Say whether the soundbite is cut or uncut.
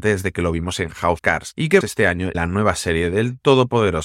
cut